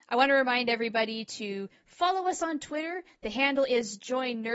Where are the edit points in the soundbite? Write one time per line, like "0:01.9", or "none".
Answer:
none